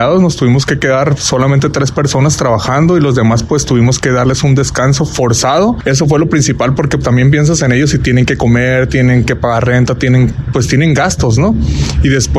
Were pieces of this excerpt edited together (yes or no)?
yes